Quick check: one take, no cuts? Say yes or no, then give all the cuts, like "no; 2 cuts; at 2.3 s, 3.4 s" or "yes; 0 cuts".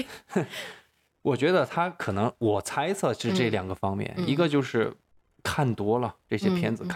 yes; 0 cuts